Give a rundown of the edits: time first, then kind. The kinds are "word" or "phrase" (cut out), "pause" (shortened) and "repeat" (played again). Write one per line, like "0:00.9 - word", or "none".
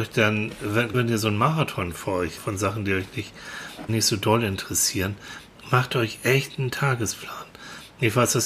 0:00.9 - word
0:02.4 - word
0:03.9 - word